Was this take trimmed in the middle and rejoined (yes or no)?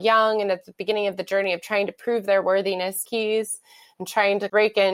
yes